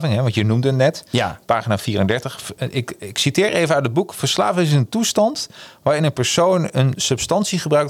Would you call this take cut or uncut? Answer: uncut